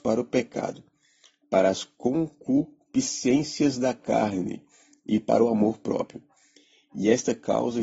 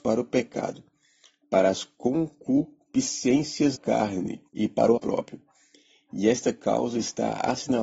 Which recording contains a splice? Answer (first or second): second